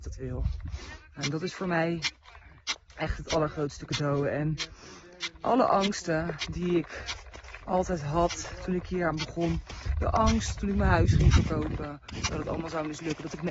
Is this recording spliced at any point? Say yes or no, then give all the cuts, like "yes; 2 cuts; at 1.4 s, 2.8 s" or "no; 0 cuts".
no; 0 cuts